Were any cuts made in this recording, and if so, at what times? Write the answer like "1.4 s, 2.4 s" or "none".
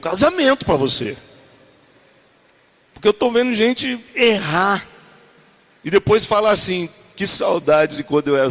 none